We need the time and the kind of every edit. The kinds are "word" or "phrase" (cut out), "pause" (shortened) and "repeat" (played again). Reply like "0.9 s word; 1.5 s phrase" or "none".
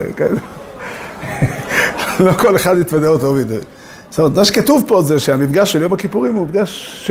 none